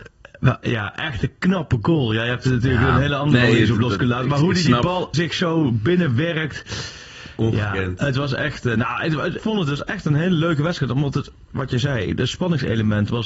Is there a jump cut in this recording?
yes; 2 cuts; at 5.1 s, 9.4 s

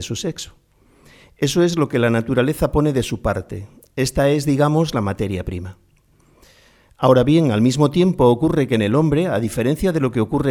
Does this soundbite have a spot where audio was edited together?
no; 0 cuts

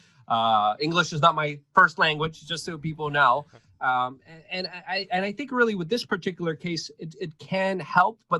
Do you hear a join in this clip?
no; 0 cuts

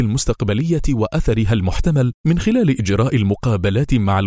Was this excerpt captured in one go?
no; 1 cut; at 2.2 s

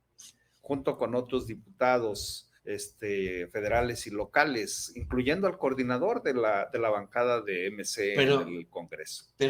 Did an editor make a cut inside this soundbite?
yes; 2 cuts; at 2.6 s, 7.4 s

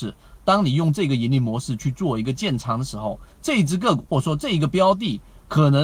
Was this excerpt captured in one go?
no; 2 cuts; at 3.3 s, 4.1 s

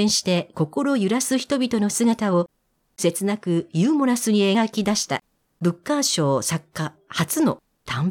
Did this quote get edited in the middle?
no; 0 cuts

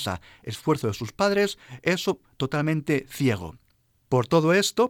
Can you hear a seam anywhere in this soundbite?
no; 0 cuts

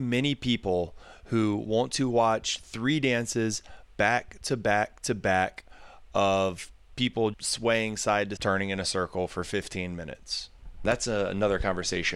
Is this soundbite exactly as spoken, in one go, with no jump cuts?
no; 2 cuts; at 7.3 s, 8.4 s

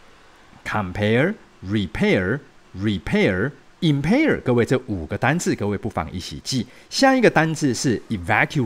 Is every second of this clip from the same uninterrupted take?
no; 1 cut; at 2.6 s

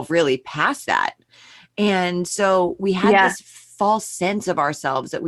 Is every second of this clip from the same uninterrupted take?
yes; 0 cuts

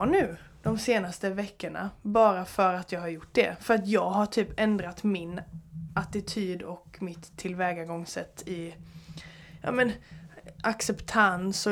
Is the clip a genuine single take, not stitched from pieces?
yes; 0 cuts

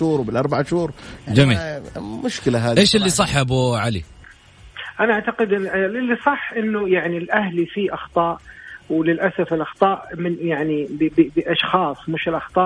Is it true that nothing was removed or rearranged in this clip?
yes; 0 cuts

